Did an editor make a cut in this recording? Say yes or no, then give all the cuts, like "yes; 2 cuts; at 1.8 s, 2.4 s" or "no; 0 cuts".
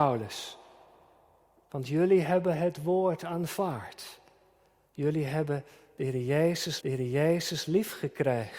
yes; 1 cut; at 6.8 s